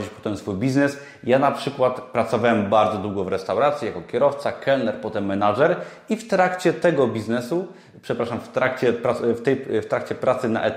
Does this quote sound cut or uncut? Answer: uncut